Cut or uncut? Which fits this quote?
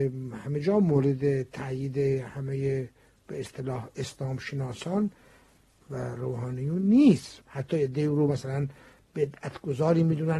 uncut